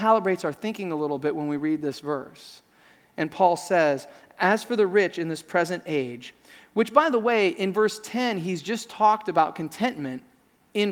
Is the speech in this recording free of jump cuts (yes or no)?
yes